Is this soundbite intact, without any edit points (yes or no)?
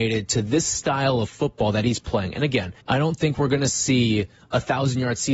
no